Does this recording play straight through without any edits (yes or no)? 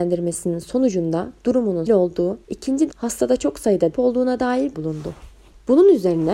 no